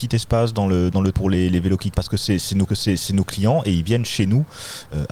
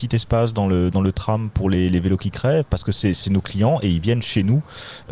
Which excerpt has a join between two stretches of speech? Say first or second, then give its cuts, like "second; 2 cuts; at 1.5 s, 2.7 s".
first; 3 cuts; at 1.1 s, 1.9 s, 2.7 s